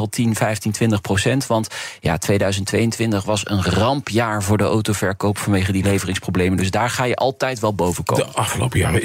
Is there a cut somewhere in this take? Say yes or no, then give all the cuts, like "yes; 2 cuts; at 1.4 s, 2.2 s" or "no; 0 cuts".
no; 0 cuts